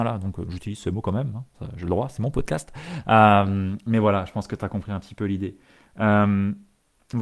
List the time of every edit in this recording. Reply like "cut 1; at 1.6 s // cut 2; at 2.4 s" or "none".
none